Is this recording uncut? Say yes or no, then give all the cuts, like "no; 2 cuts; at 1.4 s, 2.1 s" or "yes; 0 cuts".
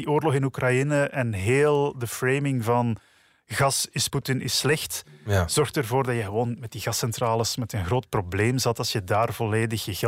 no; 1 cut; at 4.1 s